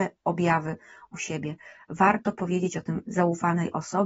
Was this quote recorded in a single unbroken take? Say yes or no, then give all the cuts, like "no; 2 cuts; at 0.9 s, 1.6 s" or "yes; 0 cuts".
yes; 0 cuts